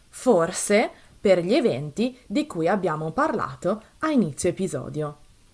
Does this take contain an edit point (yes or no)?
no